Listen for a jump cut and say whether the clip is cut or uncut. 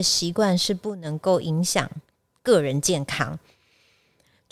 uncut